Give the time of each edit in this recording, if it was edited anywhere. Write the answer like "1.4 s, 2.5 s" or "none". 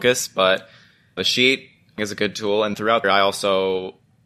1.2 s, 2.0 s, 2.7 s, 3.0 s